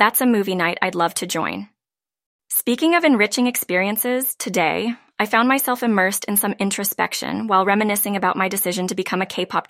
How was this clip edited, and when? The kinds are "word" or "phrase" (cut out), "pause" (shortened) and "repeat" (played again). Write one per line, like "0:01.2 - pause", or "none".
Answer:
0:02.3 - pause